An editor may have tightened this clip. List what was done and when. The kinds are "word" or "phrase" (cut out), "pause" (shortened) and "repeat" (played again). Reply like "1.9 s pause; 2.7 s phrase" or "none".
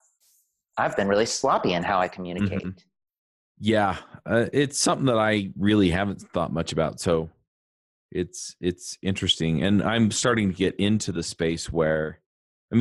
none